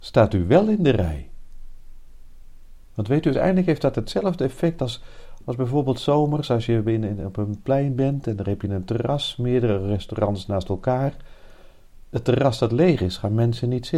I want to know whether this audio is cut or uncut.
uncut